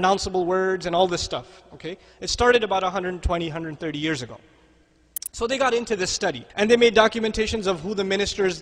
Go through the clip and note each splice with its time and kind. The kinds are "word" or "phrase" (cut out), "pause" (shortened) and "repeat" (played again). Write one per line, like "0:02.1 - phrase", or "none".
0:06.5 - pause

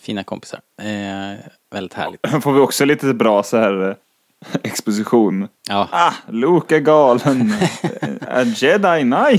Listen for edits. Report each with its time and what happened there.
none

